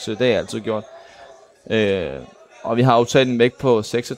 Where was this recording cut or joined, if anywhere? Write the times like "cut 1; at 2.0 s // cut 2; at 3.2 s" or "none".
none